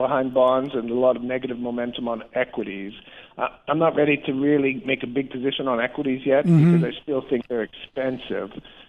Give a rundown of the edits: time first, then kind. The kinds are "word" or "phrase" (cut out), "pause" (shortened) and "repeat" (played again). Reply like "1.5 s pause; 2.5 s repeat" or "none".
none